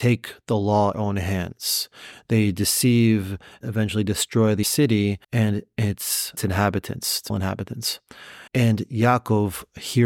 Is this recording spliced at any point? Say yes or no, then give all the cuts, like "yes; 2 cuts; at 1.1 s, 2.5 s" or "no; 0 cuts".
yes; 7 cuts; at 0.9 s, 3.6 s, 4.6 s, 5.2 s, 6.4 s, 7.3 s, 8.5 s